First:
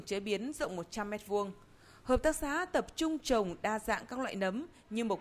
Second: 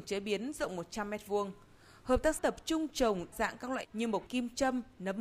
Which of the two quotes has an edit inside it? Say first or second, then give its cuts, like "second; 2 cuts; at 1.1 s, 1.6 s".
second; 4 cuts; at 2.4 s, 3.3 s, 3.8 s, 4.3 s